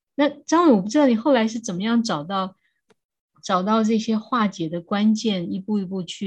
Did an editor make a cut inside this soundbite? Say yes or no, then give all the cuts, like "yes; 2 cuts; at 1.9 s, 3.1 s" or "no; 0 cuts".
no; 0 cuts